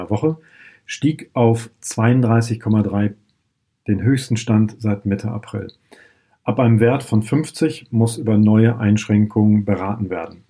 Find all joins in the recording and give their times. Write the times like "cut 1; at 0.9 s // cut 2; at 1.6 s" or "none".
none